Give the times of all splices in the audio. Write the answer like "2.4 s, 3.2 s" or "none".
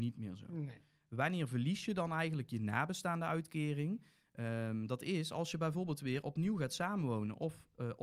none

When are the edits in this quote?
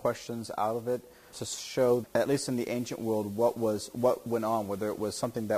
1.3 s, 2.0 s

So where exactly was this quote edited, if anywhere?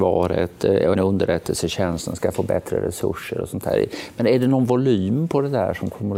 0.9 s

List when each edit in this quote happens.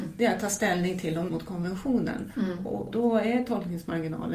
1.3 s, 2.9 s

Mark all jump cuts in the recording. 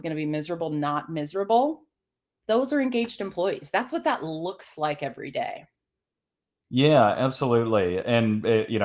none

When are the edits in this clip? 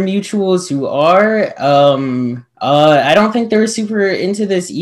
2.5 s

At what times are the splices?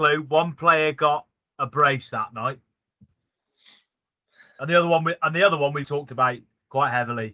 5.8 s

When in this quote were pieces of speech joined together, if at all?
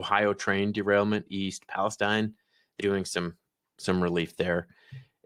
1.3 s, 2.8 s

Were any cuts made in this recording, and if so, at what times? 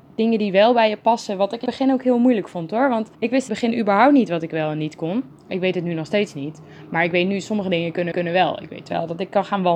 1.6 s, 3.1 s, 3.5 s, 5.4 s, 8.1 s

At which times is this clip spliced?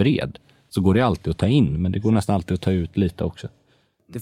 none

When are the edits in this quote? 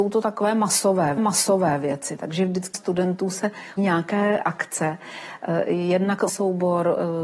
1.2 s, 2.7 s, 3.8 s, 6.3 s

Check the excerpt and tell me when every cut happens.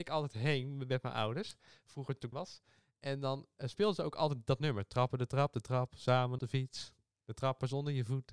2.3 s, 6.4 s

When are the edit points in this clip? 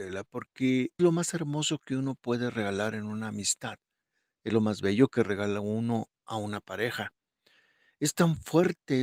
1.0 s

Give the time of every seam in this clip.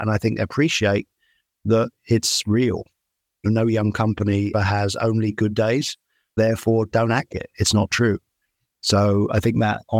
3.5 s, 4.5 s, 7.3 s

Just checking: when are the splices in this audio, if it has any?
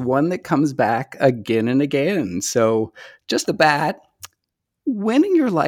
3.4 s

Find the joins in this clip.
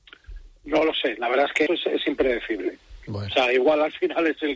1.7 s

